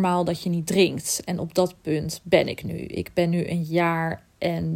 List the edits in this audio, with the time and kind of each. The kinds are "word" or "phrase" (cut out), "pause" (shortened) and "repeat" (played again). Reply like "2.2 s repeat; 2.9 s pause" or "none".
none